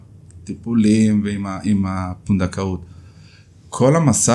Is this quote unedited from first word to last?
yes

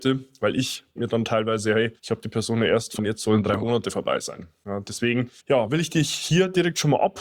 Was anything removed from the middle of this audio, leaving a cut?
yes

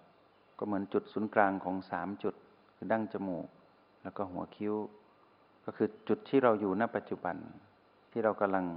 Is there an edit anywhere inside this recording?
no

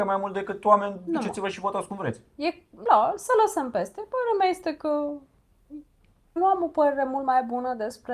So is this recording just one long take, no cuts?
no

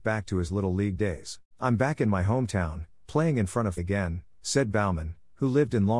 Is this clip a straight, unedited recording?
no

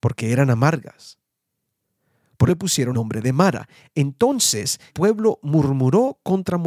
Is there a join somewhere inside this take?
yes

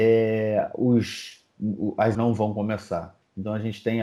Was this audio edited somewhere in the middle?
yes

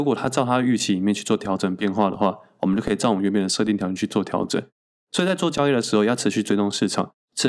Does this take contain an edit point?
no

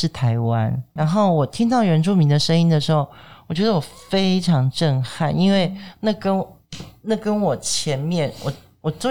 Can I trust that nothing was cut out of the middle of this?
no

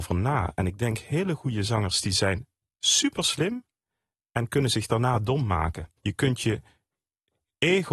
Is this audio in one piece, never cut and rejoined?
no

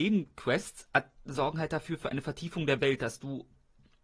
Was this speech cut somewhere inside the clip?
no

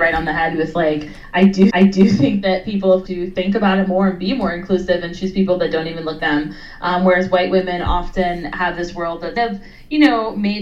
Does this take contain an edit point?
yes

